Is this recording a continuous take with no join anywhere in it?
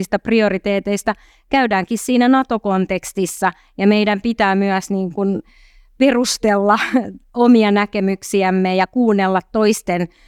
yes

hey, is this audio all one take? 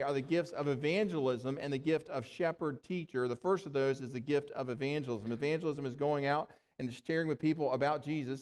yes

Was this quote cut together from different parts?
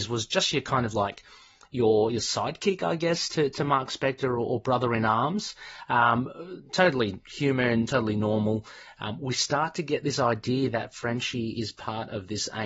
no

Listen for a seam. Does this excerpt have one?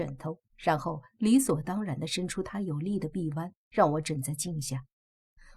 no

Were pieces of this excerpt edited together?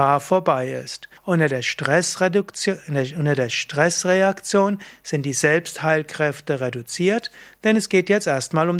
yes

